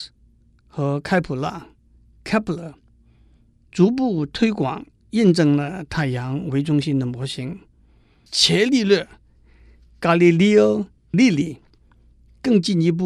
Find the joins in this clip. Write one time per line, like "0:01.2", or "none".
0:11.1

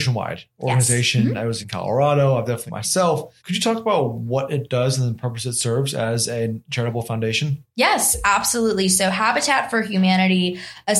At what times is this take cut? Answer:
0:01.6
0:02.7
0:03.4

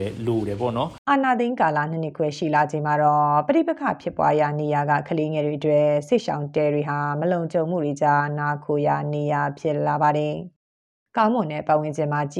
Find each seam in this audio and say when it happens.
0:01.0

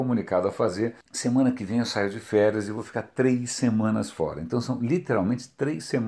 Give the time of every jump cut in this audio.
0:01.0

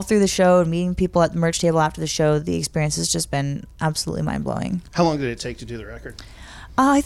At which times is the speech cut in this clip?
none

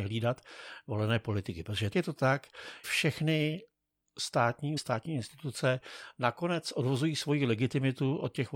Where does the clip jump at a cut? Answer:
0:01.9
0:02.8
0:04.8

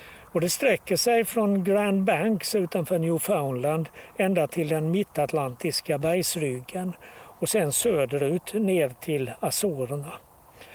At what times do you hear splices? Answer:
none

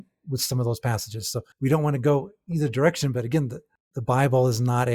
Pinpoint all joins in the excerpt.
0:01.5

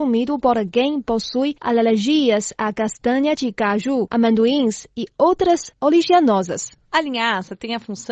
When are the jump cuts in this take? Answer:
none

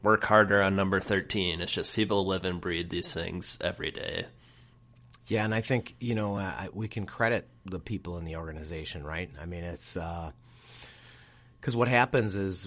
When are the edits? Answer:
none

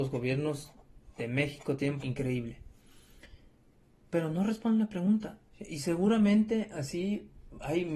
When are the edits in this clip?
0:02.0
0:05.5

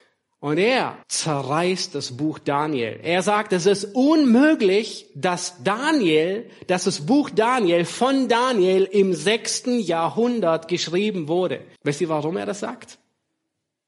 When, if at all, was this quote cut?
0:01.0
0:11.8

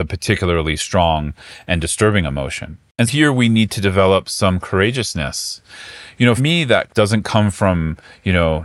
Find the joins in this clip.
0:03.1
0:06.4
0:06.9

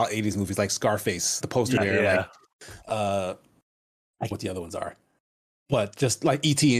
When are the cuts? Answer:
0:01.4
0:01.8
0:04.3

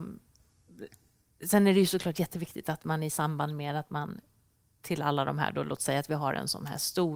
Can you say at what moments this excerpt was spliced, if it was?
none

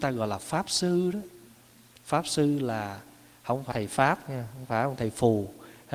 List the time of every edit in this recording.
0:03.7

